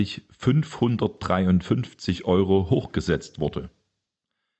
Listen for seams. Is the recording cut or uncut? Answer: uncut